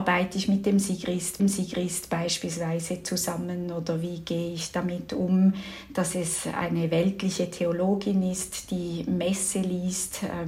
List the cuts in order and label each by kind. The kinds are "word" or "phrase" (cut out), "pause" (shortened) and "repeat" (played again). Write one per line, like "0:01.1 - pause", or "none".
0:01.4 - repeat